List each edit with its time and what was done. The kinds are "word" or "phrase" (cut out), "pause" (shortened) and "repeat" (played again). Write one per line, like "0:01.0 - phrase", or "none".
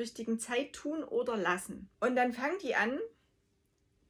0:01.9 - pause